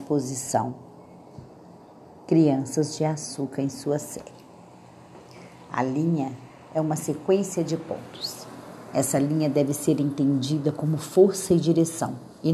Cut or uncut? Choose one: uncut